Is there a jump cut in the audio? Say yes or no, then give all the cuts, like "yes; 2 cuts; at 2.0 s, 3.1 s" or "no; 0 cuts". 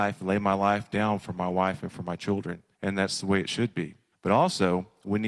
yes; 2 cuts; at 2.7 s, 4.1 s